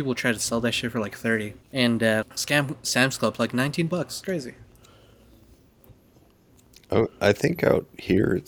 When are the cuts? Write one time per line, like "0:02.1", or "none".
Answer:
0:01.6
0:02.2
0:04.2

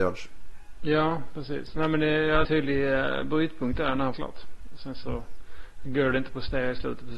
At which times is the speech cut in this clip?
0:02.4
0:04.1

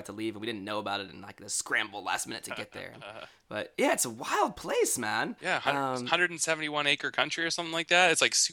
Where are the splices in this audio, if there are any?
0:05.4

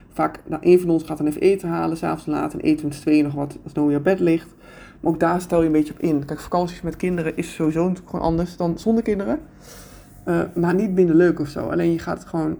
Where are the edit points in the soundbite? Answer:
none

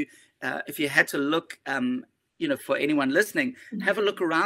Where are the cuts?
0:02.6

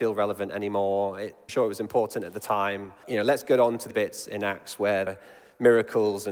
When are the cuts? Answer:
0:01.5
0:03.0
0:03.9
0:05.1

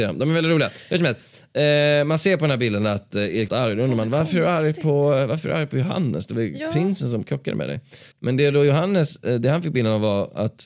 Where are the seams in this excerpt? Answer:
0:03.5
0:08.1

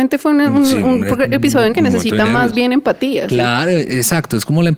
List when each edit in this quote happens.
0:01.7

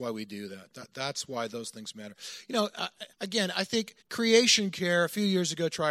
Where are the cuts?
0:03.1
0:04.0

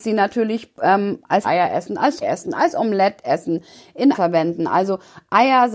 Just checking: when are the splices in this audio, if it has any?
0:01.4
0:02.2
0:04.1

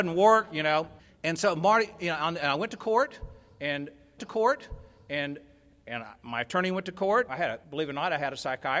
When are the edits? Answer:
0:01.0
0:04.2
0:07.3
0:07.6

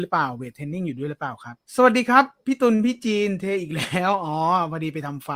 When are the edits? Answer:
0:01.7

